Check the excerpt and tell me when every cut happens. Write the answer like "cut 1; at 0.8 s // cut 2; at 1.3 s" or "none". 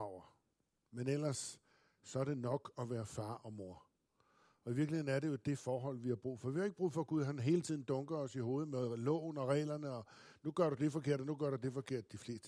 none

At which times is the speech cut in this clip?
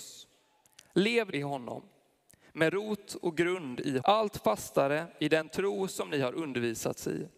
cut 1; at 1.3 s // cut 2; at 4.0 s

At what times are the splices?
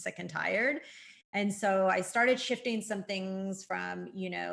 none

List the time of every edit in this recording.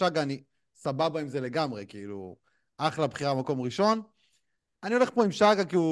none

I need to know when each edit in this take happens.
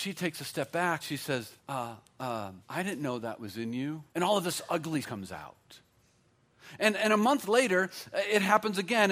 cut 1; at 1.0 s // cut 2; at 1.6 s // cut 3; at 2.6 s // cut 4; at 4.1 s // cut 5; at 5.0 s

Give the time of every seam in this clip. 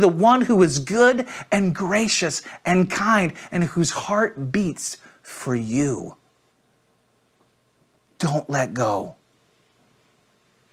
none

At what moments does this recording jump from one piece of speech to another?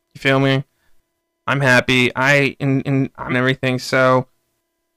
cut 1; at 2.8 s // cut 2; at 3.3 s

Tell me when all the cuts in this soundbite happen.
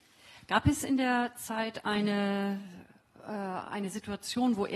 none

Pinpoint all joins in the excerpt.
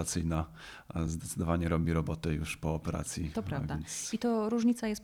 none

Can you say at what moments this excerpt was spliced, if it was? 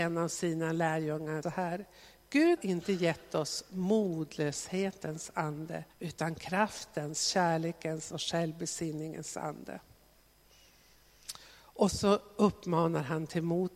cut 1; at 1.4 s // cut 2; at 2.6 s // cut 3; at 5.9 s

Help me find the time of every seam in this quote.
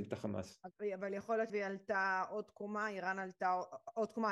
cut 1; at 1.5 s

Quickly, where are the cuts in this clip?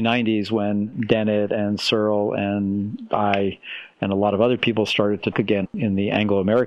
cut 1; at 5.3 s

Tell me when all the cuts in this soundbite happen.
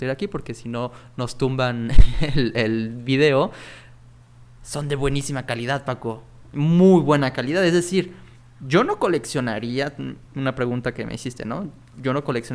none

